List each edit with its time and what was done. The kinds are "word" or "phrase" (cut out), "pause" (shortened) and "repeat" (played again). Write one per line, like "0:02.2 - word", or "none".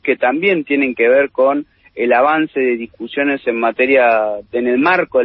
none